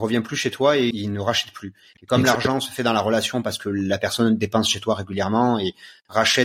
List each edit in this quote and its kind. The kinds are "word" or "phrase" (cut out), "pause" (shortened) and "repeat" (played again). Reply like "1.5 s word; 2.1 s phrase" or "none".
0.9 s word